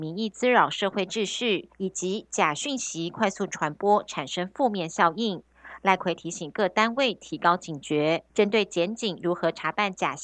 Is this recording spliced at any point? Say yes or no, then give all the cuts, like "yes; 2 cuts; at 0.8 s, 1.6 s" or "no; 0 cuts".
yes; 2 cuts; at 1.7 s, 8.3 s